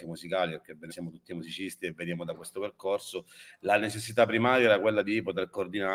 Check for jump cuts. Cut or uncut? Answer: cut